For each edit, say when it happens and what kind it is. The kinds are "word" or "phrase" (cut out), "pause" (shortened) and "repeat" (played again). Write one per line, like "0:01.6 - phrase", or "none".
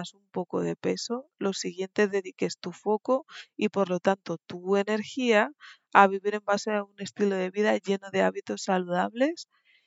none

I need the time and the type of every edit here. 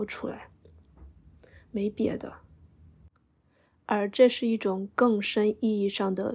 none

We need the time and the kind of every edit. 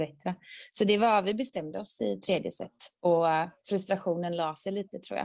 none

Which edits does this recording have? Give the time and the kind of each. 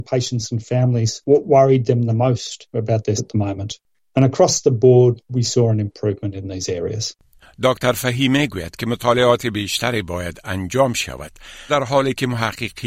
0:03.2 - word
0:11.7 - word

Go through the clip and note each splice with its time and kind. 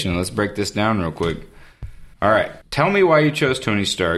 0:02.1 - pause
0:02.6 - pause

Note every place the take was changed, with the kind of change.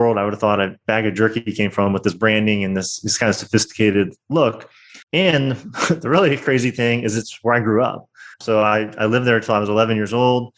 0:05.0 - pause
0:08.3 - pause

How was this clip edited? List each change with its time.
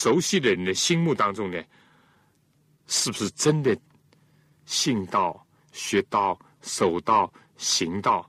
none

